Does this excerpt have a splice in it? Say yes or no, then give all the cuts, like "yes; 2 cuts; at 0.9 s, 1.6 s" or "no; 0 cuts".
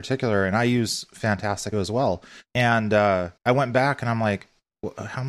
yes; 3 cuts; at 1.7 s, 2.4 s, 3.4 s